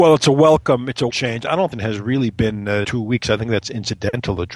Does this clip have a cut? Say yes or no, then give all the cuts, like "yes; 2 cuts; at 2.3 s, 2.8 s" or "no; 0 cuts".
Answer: yes; 3 cuts; at 1.1 s, 1.7 s, 2.8 s